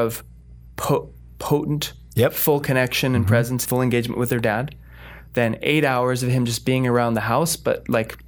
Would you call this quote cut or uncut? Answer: cut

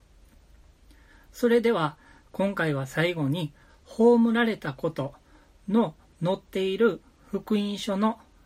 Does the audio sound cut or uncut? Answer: uncut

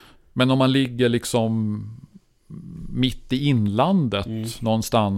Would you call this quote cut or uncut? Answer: uncut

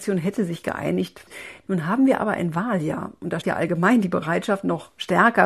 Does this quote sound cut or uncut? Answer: cut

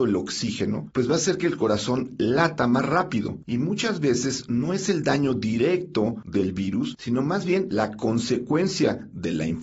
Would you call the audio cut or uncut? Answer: uncut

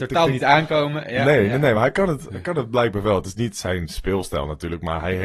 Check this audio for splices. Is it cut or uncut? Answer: uncut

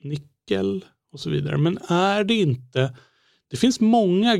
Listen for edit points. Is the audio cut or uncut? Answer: uncut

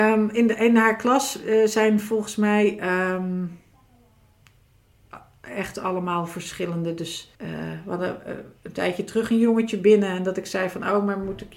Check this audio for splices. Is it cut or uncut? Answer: cut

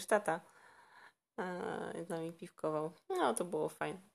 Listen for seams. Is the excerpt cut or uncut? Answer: cut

